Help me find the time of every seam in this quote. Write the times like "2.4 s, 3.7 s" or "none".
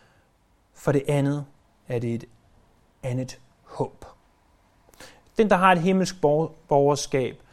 none